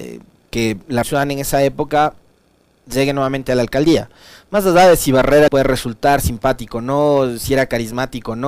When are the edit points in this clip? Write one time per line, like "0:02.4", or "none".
0:01.0
0:02.3
0:05.5